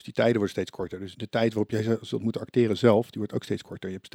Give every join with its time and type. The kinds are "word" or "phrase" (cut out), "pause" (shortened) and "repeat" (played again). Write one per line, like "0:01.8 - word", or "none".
0:01.1 - word